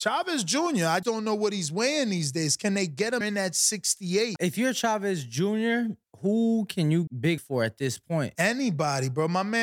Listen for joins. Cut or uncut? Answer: cut